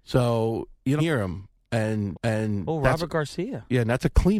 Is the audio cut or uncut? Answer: cut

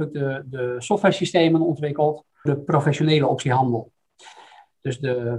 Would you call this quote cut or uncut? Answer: cut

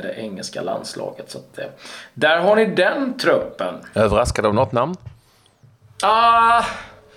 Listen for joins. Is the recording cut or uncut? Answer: uncut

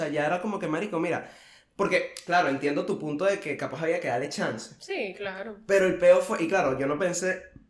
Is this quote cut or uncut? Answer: uncut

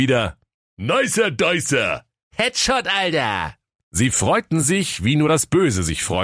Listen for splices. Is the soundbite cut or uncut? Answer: uncut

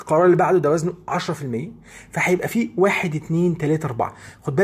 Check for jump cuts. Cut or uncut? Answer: uncut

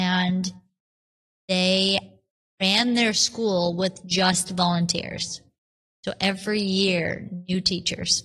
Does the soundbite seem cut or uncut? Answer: uncut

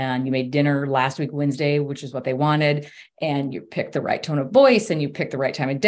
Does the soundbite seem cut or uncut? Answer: uncut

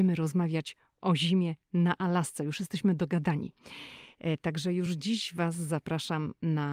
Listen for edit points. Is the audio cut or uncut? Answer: uncut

